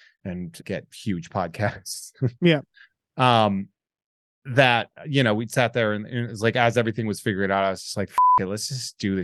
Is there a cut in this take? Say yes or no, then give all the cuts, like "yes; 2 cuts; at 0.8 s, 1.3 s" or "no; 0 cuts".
no; 0 cuts